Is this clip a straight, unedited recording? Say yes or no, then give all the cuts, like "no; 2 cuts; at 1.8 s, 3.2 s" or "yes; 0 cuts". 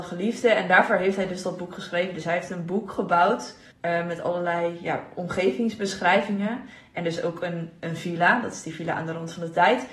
no; 1 cut; at 3.7 s